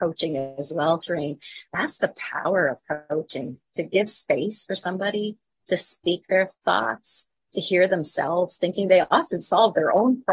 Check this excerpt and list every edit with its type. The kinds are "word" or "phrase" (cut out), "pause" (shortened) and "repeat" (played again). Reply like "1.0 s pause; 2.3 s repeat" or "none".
none